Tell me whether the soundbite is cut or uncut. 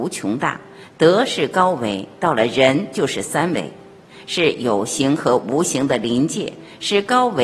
uncut